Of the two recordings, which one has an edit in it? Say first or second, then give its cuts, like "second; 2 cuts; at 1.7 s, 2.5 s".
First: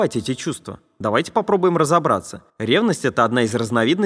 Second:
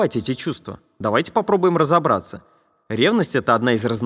first; 1 cut; at 2.5 s